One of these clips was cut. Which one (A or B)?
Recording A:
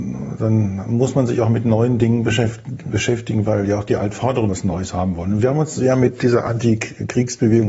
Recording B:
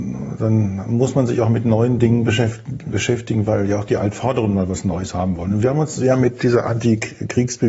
A